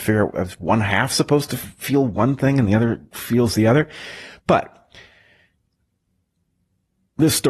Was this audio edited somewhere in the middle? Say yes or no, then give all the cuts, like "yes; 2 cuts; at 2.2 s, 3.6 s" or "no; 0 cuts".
no; 0 cuts